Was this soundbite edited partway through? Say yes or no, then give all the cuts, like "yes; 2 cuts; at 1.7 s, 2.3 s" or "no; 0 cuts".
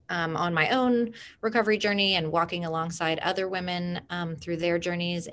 no; 0 cuts